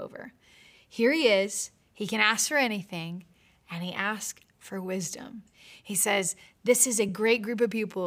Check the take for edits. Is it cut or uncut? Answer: uncut